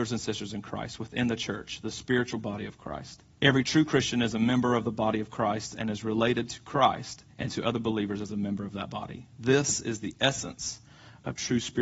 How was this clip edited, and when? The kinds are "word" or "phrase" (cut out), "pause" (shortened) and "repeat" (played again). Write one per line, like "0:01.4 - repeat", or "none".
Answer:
0:03.3 - pause
0:07.3 - pause